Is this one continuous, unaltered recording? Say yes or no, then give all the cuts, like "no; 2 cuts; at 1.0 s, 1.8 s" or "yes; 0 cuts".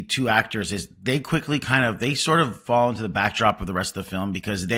yes; 0 cuts